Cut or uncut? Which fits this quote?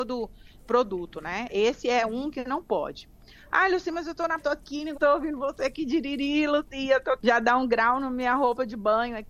cut